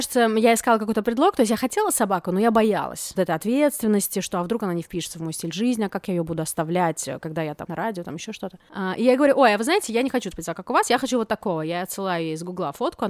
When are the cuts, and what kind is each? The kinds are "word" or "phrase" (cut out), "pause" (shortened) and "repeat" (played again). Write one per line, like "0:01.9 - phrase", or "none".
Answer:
0:03.2 - word
0:07.7 - phrase
0:10.3 - word